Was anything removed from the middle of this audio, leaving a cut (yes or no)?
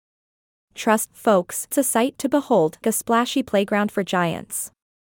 yes